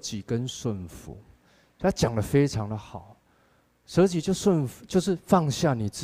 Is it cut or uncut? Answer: uncut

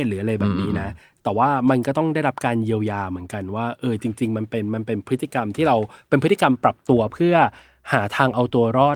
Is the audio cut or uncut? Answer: uncut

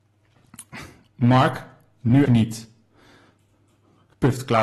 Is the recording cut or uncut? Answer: cut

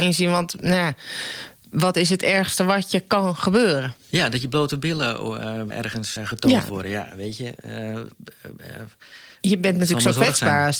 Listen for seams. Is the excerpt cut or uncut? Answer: cut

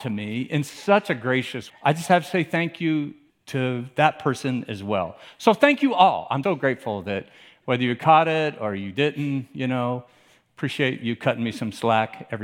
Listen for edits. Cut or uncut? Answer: cut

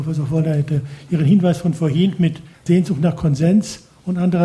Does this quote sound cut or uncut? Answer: cut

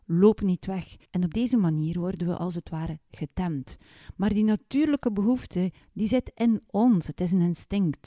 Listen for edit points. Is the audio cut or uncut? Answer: cut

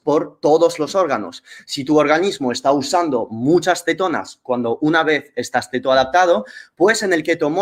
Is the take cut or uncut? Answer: uncut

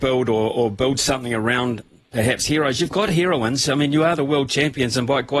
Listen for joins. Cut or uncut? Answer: uncut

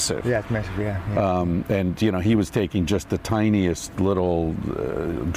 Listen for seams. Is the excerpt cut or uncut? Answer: uncut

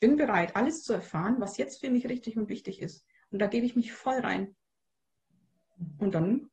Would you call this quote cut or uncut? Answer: uncut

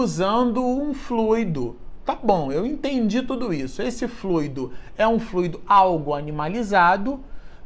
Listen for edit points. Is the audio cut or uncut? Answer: uncut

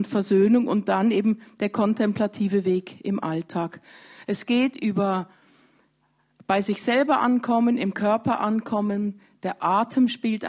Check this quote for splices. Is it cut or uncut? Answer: uncut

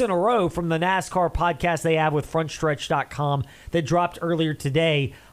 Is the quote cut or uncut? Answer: uncut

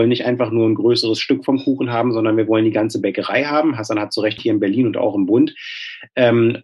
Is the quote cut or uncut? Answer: cut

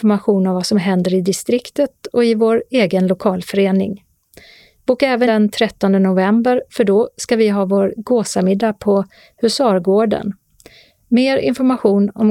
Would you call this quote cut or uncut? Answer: cut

